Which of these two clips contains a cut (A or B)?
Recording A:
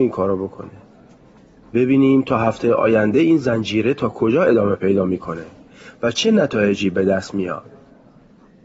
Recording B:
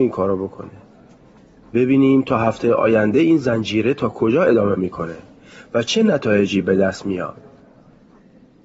B